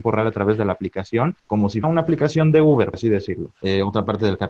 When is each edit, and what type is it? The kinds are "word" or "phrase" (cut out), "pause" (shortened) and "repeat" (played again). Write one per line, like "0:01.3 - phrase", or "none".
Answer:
0:01.4 - pause
0:01.8 - word
0:02.9 - word